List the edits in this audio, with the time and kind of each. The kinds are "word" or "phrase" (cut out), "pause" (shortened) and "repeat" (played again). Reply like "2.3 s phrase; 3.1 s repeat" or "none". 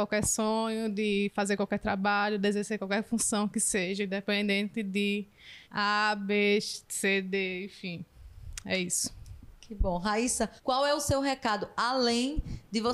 5.6 s pause; 10.6 s pause